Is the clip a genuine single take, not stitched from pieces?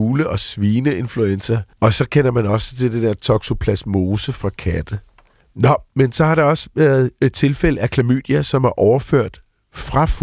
no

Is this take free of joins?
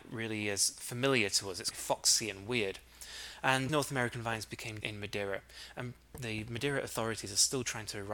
no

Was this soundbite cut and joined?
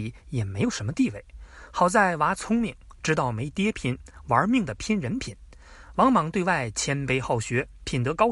no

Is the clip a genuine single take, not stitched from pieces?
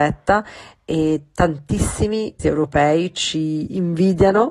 no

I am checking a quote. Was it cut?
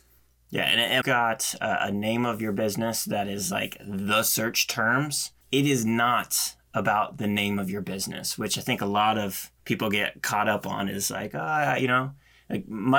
yes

